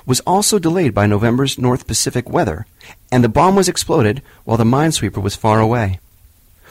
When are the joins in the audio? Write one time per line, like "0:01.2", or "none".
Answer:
none